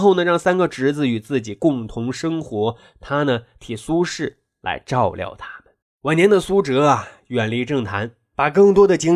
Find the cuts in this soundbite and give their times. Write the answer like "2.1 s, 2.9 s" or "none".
5.8 s